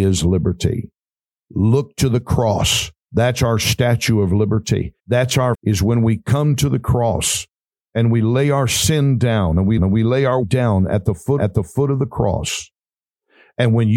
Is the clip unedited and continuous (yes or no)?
no